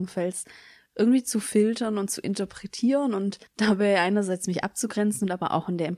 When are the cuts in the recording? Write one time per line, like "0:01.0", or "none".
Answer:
0:03.5